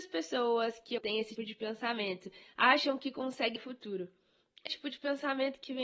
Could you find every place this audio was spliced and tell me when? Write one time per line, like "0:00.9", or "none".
0:01.0
0:01.4
0:03.6
0:04.7